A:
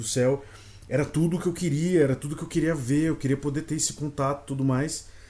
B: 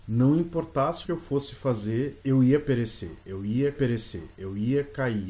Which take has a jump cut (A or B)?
B